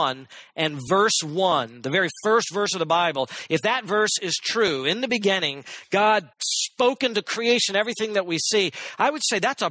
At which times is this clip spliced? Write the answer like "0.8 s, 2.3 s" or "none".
6.3 s